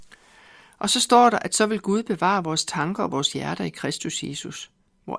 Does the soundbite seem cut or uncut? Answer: uncut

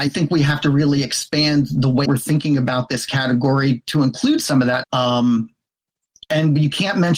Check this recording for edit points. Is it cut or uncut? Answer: cut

